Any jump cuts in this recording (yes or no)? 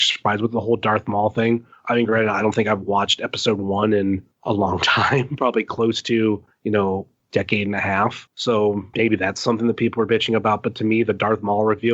yes